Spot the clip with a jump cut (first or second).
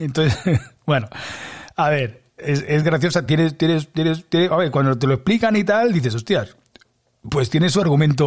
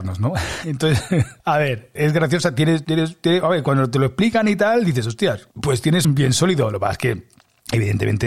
second